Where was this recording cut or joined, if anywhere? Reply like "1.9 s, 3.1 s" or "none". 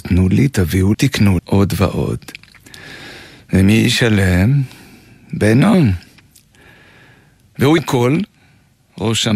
0.9 s, 1.4 s, 7.8 s